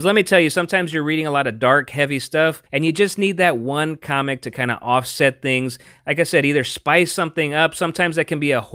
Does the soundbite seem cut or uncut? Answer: cut